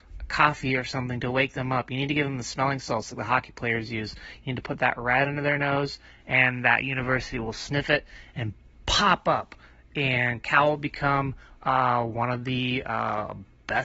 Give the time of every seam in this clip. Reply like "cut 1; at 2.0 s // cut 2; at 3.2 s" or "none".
none